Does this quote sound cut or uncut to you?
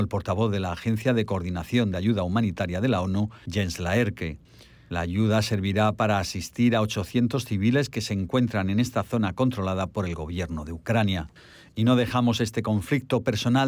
uncut